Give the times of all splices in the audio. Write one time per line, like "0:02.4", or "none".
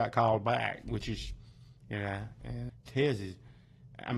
0:02.7